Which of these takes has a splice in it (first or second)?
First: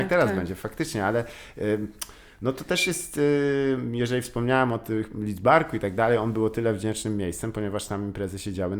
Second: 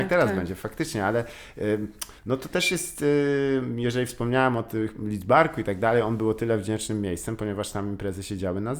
second